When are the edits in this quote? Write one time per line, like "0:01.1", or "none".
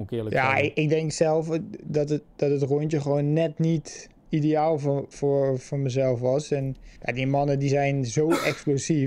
0:04.2
0:07.0